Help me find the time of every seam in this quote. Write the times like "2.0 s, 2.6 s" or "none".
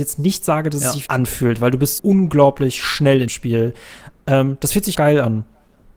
1.1 s, 2.0 s, 3.3 s, 4.9 s